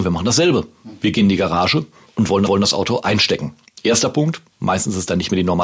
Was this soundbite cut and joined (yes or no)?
yes